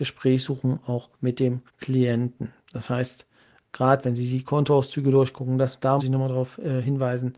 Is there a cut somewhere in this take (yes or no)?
yes